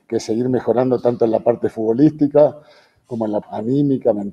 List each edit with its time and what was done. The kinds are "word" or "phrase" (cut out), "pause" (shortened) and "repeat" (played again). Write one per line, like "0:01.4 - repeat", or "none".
0:03.4 - word